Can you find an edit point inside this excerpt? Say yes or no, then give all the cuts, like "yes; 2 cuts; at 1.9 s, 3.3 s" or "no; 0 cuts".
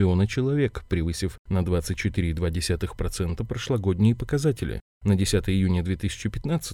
no; 0 cuts